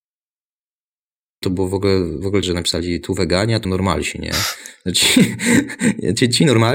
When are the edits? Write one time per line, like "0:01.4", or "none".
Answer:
0:02.4
0:03.6

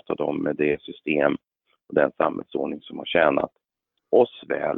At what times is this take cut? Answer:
none

